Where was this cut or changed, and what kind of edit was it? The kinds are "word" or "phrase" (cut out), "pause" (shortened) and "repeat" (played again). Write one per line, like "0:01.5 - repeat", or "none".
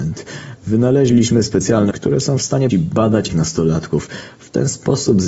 0:01.9 - word
0:02.7 - word
0:03.3 - word